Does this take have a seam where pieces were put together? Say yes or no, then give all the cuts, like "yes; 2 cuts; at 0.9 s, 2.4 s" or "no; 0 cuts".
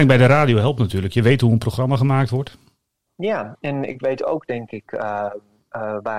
no; 0 cuts